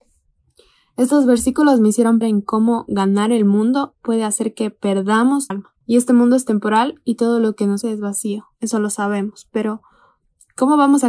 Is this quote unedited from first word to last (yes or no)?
no